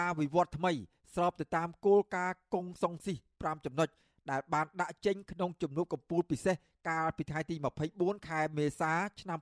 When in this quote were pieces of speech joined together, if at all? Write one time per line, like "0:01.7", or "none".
none